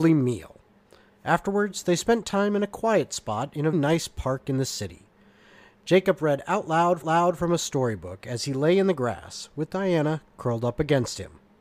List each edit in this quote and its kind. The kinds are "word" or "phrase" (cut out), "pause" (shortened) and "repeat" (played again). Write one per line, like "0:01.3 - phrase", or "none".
0:03.7 - word
0:07.0 - repeat